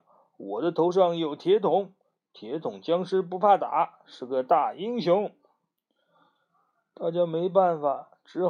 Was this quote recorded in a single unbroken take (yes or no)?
yes